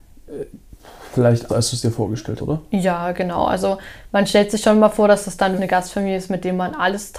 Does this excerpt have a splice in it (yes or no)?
yes